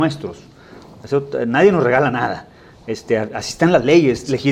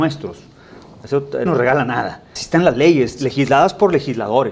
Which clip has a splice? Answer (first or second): second